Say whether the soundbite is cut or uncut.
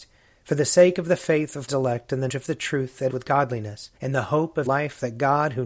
cut